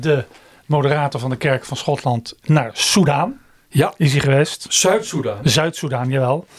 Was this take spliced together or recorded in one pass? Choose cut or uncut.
uncut